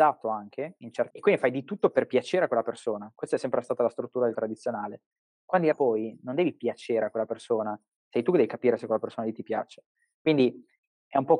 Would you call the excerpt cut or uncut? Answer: cut